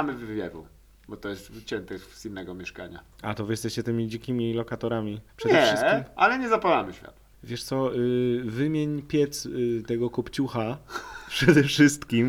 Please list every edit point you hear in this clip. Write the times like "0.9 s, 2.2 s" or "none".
3.1 s, 5.3 s, 7.3 s